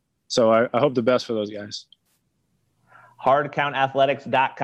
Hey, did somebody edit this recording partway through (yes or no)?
no